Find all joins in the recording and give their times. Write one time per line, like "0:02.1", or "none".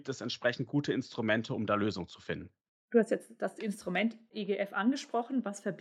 0:02.7